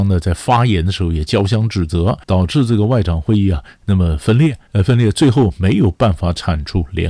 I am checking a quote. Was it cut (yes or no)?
yes